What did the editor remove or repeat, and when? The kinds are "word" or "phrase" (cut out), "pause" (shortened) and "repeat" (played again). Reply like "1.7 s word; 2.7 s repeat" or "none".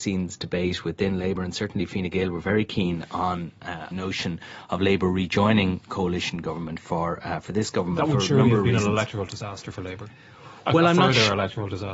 3.9 s phrase